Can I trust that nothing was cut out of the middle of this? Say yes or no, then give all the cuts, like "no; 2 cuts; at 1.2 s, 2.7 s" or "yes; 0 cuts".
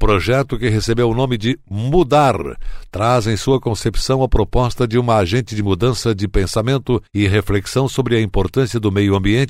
no; 1 cut; at 7.1 s